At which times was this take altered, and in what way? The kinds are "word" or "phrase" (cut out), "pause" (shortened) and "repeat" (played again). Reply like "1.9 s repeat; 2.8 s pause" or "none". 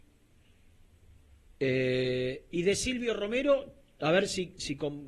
none